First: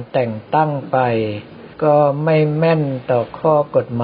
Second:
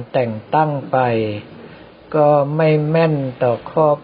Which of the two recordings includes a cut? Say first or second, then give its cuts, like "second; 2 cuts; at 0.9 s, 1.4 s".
first; 1 cut; at 1.7 s